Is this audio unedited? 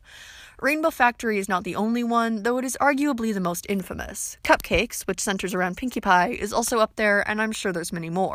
yes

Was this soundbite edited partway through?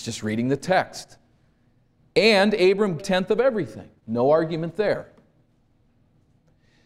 yes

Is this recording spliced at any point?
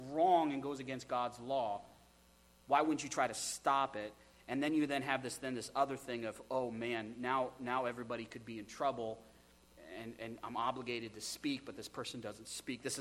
no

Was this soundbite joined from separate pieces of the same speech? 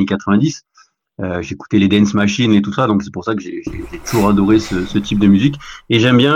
no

